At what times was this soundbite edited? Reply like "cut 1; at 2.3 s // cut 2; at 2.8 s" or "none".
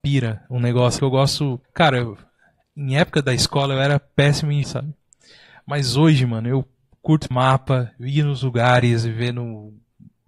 cut 1; at 1.0 s // cut 2; at 1.6 s // cut 3; at 4.6 s // cut 4; at 7.3 s